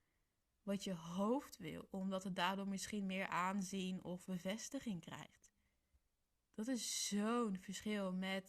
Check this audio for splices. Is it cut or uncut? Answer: uncut